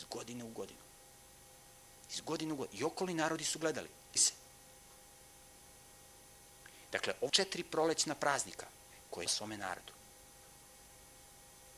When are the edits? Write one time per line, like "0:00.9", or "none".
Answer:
0:04.2
0:07.3
0:09.3